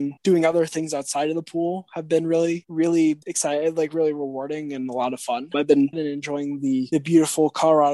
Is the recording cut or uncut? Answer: cut